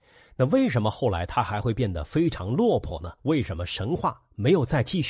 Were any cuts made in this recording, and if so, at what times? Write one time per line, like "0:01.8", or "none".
0:03.2